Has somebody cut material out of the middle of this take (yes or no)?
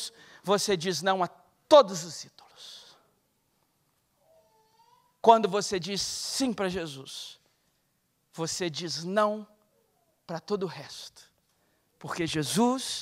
no